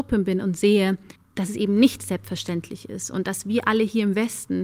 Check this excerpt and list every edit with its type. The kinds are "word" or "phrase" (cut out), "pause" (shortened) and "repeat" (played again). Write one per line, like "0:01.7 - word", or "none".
0:01.2 - pause